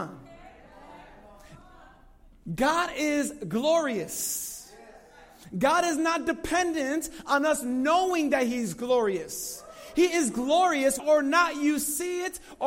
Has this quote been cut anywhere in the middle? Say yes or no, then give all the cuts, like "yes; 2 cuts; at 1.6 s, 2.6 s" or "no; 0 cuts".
yes; 1 cut; at 11.0 s